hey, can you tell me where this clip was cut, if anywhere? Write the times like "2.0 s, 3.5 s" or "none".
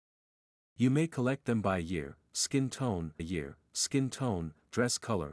3.2 s